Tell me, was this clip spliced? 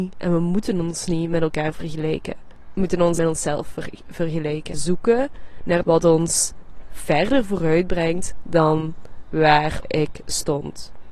yes; 4 cuts; at 3.2 s, 4.7 s, 5.8 s, 9.8 s

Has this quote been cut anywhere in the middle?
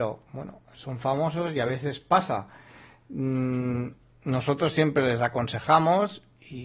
no; 0 cuts

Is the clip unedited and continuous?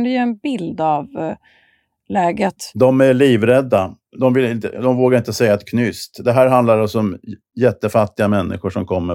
yes; 0 cuts

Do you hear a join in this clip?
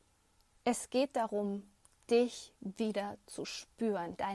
no; 0 cuts

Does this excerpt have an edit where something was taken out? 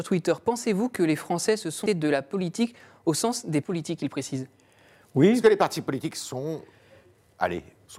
yes; 2 cuts; at 1.9 s, 3.6 s

